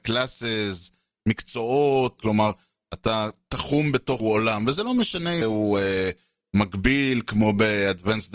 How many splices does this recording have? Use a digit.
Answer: 3